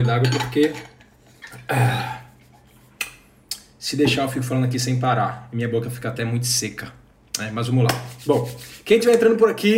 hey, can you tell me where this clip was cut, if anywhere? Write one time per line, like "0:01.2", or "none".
none